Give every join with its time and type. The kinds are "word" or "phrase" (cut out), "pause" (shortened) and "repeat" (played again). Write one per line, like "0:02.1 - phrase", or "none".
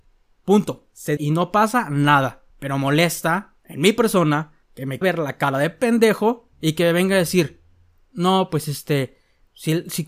0:01.2 - word
0:02.5 - pause
0:03.6 - pause
0:04.6 - pause
0:05.0 - word
0:06.5 - pause